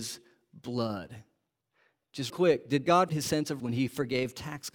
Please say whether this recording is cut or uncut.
cut